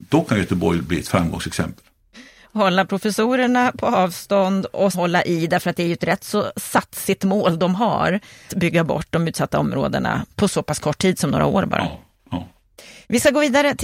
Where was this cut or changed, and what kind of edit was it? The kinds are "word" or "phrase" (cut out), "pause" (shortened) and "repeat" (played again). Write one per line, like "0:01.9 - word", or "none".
0:04.9 - word
0:08.5 - word